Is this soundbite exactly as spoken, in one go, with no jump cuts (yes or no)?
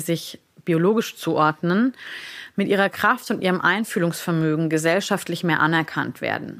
yes